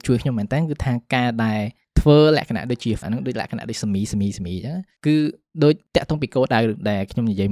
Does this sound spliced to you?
yes; 1 cut; at 3.0 s

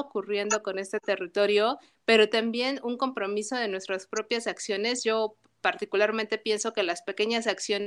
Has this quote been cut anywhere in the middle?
no; 0 cuts

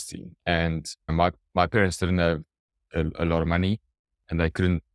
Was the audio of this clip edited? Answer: no; 0 cuts

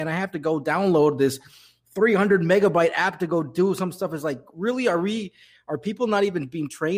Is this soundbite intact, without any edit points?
yes; 0 cuts

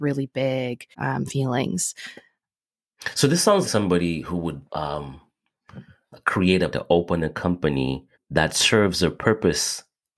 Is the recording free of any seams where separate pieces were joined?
no; 5 cuts; at 0.9 s, 3.6 s, 4.7 s, 6.7 s, 8.1 s

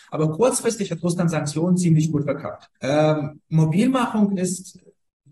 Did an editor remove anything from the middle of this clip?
yes; 1 cut; at 2.8 s

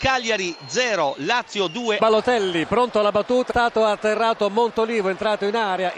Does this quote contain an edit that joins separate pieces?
yes; 1 cut; at 3.5 s

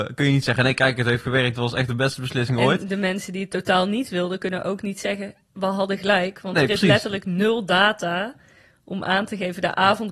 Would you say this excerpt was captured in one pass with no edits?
yes; 0 cuts

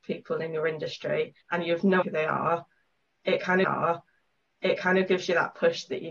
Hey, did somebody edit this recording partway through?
yes; 3 cuts; at 1.4 s, 2.0 s, 3.6 s

